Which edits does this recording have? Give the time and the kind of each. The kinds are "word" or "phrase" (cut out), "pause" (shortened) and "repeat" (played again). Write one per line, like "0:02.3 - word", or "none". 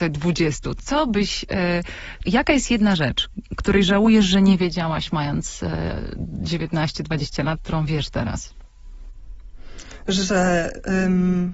0:02.2 - word